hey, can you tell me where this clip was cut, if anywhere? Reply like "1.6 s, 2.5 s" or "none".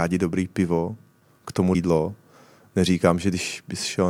1.7 s